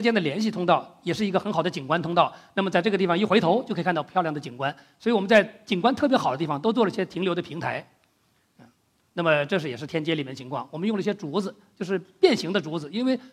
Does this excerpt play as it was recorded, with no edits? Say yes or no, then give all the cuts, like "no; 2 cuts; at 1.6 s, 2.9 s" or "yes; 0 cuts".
yes; 0 cuts